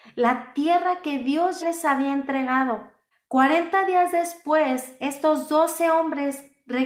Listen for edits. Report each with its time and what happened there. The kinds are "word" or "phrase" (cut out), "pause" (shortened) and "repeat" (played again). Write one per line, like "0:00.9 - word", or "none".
0:01.6 - word
0:03.1 - pause